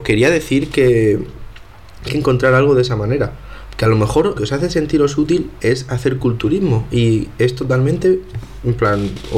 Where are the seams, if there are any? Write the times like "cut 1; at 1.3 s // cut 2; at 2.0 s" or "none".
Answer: cut 1; at 2.1 s // cut 2; at 4.4 s